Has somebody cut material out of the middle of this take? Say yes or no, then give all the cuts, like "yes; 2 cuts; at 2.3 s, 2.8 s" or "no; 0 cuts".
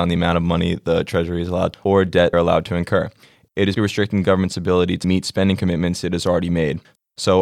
yes; 4 cuts; at 1.7 s, 2.3 s, 3.8 s, 5.0 s